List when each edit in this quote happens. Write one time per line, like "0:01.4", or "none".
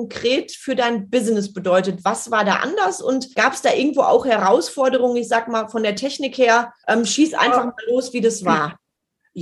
0:03.3
0:06.8